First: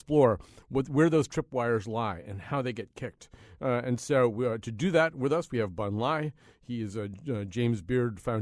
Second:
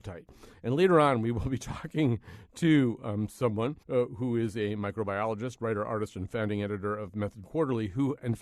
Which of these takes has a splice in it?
second; 1 cut; at 3.8 s

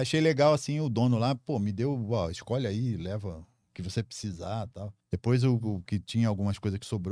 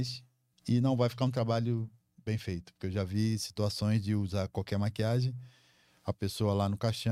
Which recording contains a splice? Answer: first; 1 cut; at 5.0 s

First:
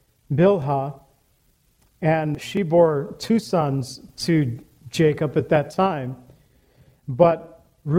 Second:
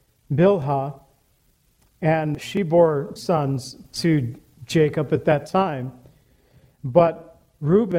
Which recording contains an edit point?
second; 1 cut; at 3.2 s

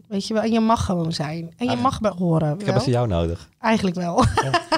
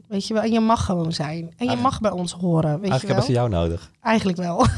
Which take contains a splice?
first; 2 cuts; at 2.1 s, 2.6 s

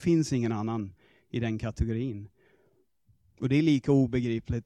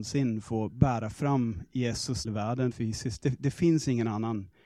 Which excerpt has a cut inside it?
second; 2 cuts; at 2.2 s, 2.7 s

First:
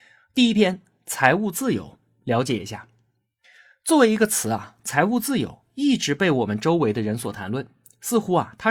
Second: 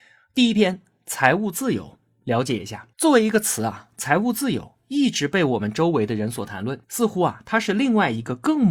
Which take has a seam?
second; 2 cuts; at 2.9 s, 6.8 s

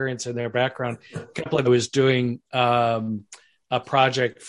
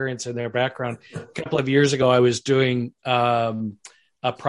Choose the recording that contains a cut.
first; 1 cut; at 1.6 s

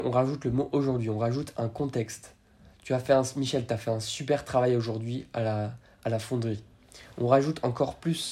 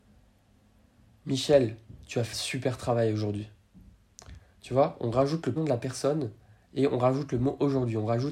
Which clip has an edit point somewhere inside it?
second; 2 cuts; at 2.3 s, 5.6 s

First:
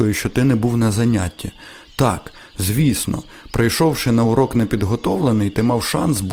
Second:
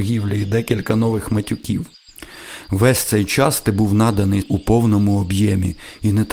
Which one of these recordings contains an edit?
second; 1 cut; at 4.4 s

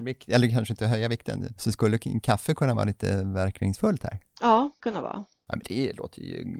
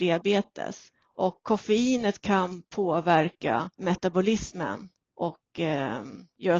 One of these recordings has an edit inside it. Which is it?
first; 1 cut; at 4.8 s

